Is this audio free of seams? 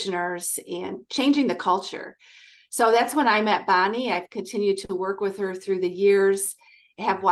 yes; 0 cuts

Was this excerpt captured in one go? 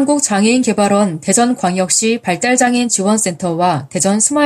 yes; 0 cuts

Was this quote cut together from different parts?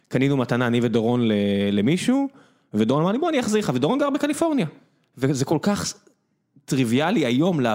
no; 0 cuts

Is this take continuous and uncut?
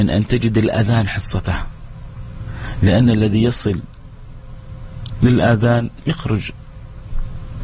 yes; 0 cuts

